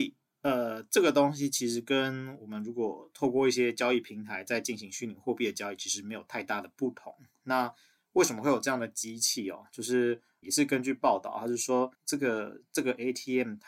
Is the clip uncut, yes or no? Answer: no